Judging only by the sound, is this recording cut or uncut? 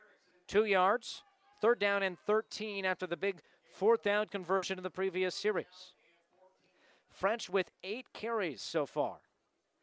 uncut